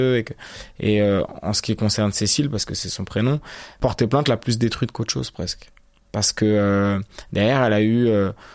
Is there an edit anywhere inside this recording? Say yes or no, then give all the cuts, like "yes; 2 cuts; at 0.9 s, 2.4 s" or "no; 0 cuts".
no; 0 cuts